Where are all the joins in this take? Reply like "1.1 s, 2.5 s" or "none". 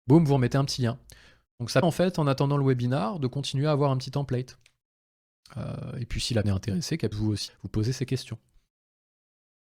1.8 s, 6.4 s, 7.1 s, 7.5 s